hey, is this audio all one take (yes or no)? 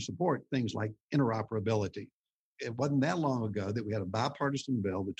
yes